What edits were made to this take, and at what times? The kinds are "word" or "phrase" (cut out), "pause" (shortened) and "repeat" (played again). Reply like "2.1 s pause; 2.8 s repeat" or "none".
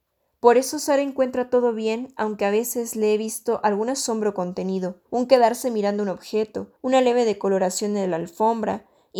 5.0 s pause; 6.8 s pause